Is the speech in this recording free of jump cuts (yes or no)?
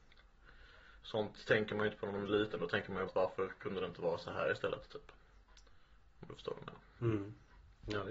no